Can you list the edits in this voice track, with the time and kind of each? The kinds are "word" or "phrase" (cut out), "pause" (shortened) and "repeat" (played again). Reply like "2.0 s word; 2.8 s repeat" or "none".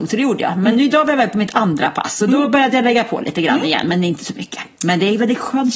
none

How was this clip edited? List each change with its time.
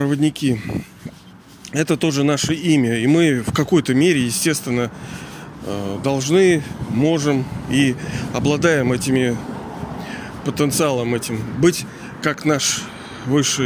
none

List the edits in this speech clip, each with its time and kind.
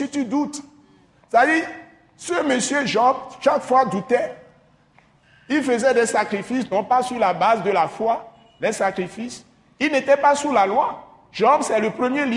none

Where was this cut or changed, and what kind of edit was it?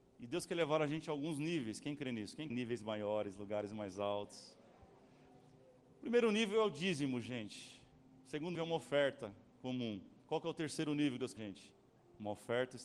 2.5 s phrase; 8.5 s word; 10.2 s pause; 11.4 s phrase

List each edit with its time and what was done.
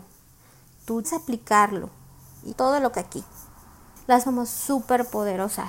1.0 s word; 2.5 s word; 2.9 s word; 4.2 s word

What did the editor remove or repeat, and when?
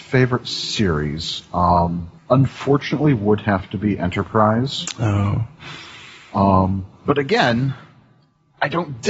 2.2 s pause

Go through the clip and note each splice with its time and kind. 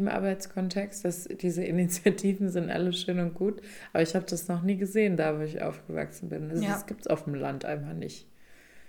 none

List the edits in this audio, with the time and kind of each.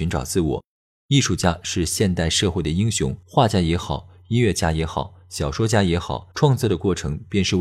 3.2 s pause; 6.3 s pause

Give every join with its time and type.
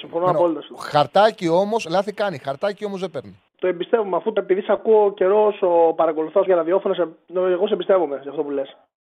3.5 s pause; 4.4 s word; 6.5 s phrase

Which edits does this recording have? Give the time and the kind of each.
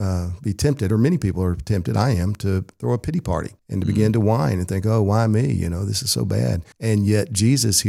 3.6 s pause; 6.7 s pause

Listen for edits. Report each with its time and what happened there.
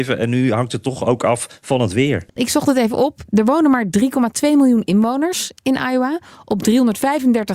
2.3 s pause

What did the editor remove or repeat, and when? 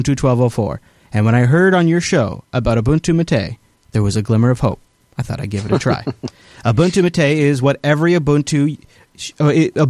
none

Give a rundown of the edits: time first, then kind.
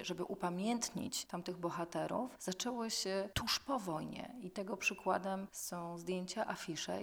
none

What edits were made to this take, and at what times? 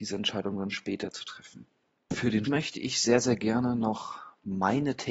2.4 s word

